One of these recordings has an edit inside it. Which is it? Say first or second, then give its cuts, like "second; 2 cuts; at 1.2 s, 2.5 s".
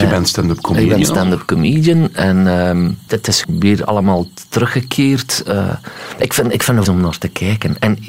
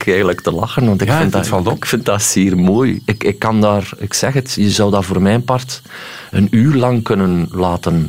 first; 3 cuts; at 3.1 s, 3.4 s, 6.8 s